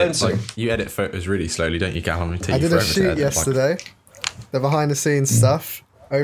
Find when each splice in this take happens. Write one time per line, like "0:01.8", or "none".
none